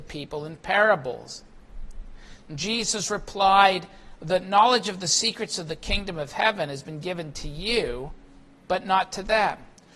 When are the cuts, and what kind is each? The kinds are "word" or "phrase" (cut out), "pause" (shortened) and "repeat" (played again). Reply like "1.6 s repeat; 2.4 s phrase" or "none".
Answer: none